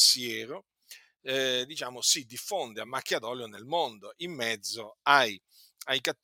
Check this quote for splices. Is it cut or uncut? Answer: uncut